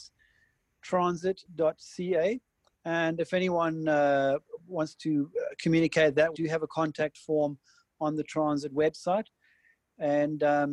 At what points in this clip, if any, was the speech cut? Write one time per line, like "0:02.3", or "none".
0:06.3